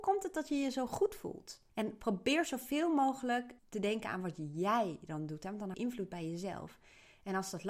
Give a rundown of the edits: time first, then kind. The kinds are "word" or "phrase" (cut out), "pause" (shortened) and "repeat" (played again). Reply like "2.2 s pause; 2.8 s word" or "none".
1.7 s pause; 3.6 s pause; 5.7 s word